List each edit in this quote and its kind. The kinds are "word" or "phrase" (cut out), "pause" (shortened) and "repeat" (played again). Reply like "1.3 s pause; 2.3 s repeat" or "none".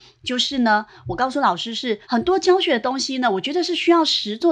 2.0 s pause